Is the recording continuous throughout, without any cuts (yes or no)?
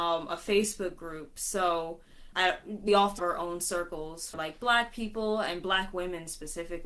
no